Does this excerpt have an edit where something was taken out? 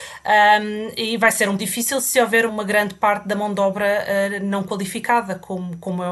yes; 2 cuts; at 1.6 s, 2.5 s

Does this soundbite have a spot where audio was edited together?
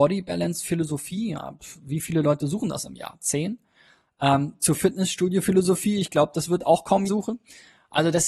yes; 1 cut; at 7.1 s

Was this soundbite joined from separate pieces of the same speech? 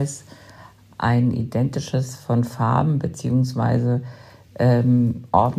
yes; 1 cut; at 2.2 s

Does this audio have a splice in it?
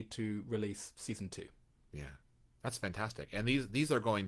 no; 0 cuts

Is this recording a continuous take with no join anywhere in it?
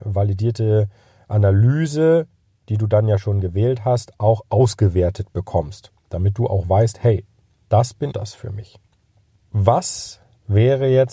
no; 1 cut; at 8.1 s

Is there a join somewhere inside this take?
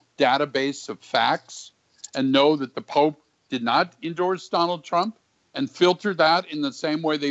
no; 0 cuts

